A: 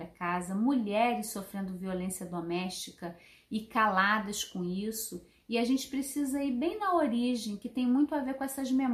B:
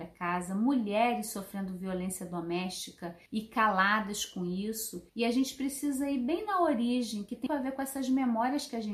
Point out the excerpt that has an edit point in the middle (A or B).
B